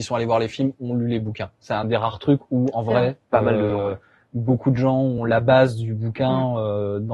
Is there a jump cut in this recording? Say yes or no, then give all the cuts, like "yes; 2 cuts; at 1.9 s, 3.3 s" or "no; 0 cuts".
no; 0 cuts